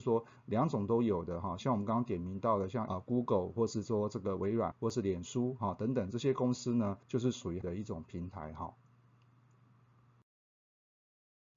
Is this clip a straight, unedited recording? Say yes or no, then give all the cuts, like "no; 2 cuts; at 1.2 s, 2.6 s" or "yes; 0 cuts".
no; 4 cuts; at 2.9 s, 4.7 s, 7.0 s, 7.6 s